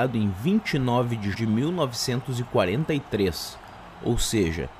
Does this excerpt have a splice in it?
yes; 1 cut; at 1.3 s

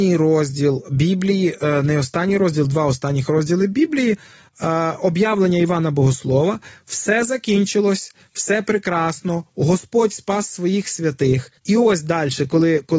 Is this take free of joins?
no; 1 cut; at 11.6 s

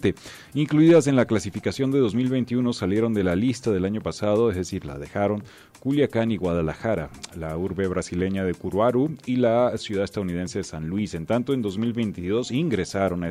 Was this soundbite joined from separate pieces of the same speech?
no; 0 cuts

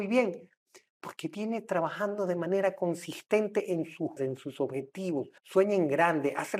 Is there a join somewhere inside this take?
yes; 2 cuts; at 4.2 s, 5.4 s

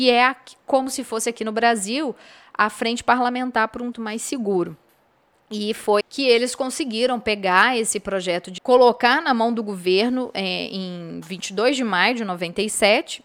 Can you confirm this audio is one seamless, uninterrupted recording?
no; 3 cuts; at 3.9 s, 6.0 s, 8.6 s

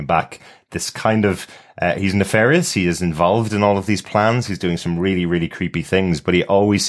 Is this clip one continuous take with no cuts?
yes; 0 cuts

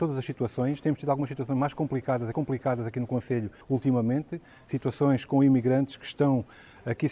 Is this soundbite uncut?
no; 2 cuts; at 2.3 s, 3.6 s

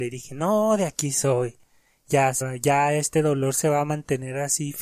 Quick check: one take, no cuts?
no; 1 cut; at 2.4 s

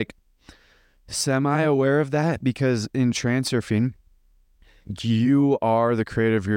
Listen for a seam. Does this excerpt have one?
no; 0 cuts

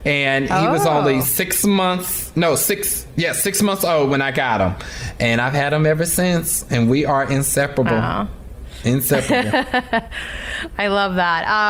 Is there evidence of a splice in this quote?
no; 0 cuts

